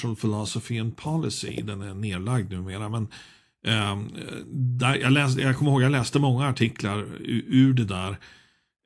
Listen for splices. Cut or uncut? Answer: uncut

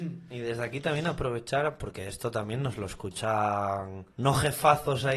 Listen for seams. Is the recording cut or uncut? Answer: cut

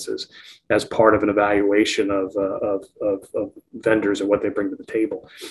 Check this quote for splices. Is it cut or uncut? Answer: uncut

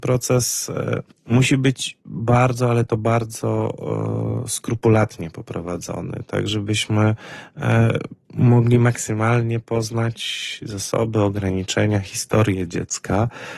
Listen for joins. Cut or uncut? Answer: cut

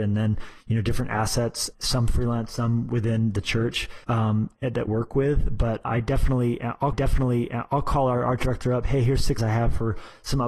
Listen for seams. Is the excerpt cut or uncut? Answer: cut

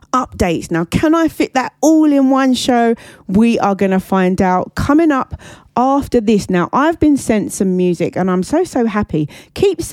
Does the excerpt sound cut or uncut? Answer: uncut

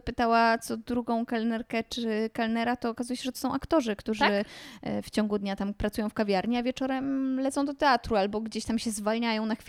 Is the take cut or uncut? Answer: uncut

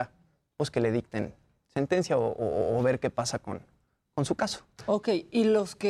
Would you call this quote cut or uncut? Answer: uncut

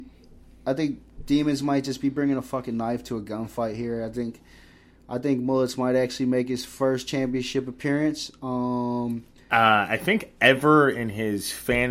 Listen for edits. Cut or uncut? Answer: uncut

